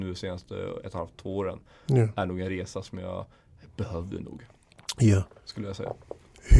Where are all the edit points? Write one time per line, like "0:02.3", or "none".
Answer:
none